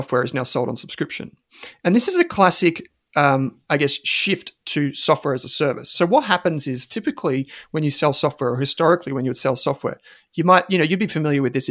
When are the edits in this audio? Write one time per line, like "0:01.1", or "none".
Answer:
none